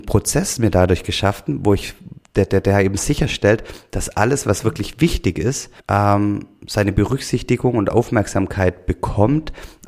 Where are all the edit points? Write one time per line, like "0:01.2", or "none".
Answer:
0:05.8